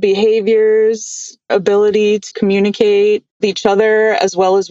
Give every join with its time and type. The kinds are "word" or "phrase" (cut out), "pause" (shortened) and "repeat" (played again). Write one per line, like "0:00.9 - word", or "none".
0:01.5 - word
0:02.3 - word
0:03.4 - word